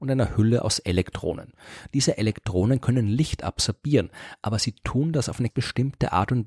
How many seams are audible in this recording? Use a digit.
1